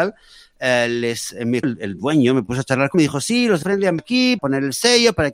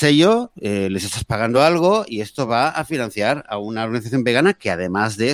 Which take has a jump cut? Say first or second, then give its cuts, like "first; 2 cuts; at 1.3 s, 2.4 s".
first; 5 cuts; at 1.6 s, 2.9 s, 3.6 s, 4.0 s, 4.4 s